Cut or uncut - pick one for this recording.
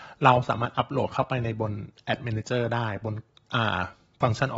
uncut